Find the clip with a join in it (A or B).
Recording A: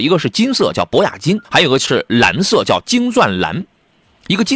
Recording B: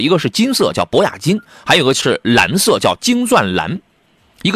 A